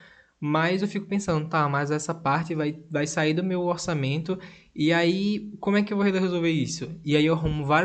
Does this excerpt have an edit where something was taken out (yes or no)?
no